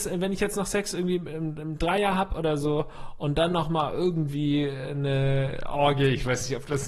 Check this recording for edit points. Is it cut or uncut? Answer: uncut